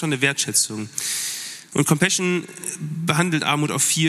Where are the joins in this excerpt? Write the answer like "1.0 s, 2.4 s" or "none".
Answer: none